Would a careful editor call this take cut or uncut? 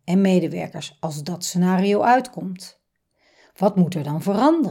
uncut